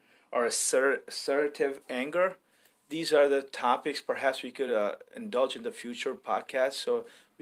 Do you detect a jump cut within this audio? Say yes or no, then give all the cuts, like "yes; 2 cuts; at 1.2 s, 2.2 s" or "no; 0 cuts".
no; 0 cuts